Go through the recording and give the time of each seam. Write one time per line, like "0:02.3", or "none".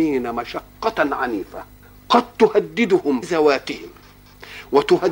0:01.8
0:03.2